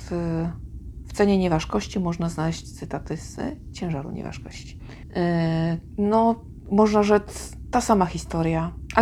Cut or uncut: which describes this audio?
uncut